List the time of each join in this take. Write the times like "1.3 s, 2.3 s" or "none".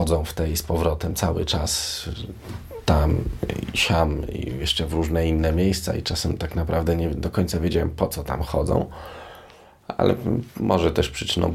none